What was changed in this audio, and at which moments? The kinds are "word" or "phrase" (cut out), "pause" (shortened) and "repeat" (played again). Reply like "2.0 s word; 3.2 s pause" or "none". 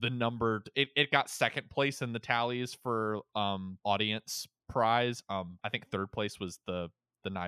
3.8 s pause; 5.6 s pause

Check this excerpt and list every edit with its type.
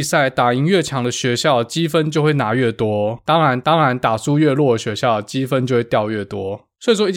3.6 s repeat

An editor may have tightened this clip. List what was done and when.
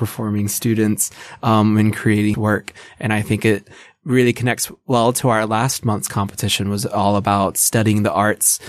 2.3 s word

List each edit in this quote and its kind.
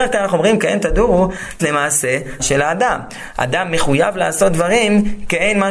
1.6 s word; 2.4 s word

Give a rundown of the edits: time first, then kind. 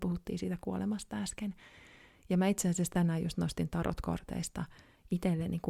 none

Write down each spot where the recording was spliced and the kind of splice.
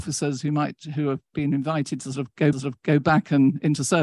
2.5 s repeat

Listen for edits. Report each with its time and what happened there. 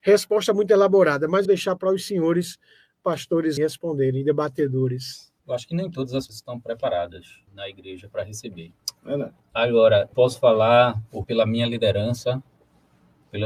1.4 s phrase; 3.6 s word; 5.4 s pause; 6.3 s word; 7.5 s pause; 10.1 s word; 11.2 s word

